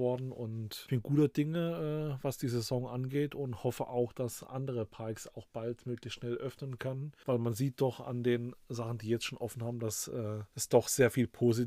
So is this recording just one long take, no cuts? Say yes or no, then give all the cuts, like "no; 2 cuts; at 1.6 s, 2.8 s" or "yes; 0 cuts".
yes; 0 cuts